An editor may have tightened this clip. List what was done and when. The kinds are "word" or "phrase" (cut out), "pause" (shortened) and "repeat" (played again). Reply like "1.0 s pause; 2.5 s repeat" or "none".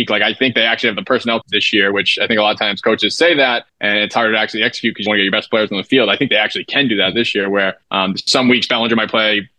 1.4 s phrase; 3.7 s pause; 5.1 s word; 7.8 s pause

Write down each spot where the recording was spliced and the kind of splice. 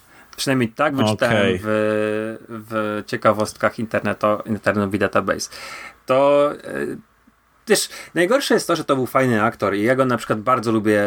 none

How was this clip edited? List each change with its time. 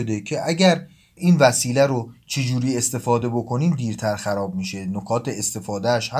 none

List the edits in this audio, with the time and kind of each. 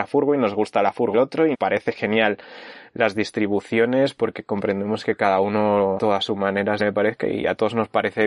1.1 s word; 1.5 s word; 3.1 s word; 6.0 s word; 6.8 s word

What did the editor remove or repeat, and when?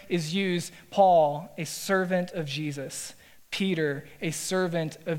none

